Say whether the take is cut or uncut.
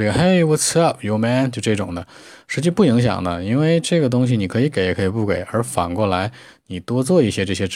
uncut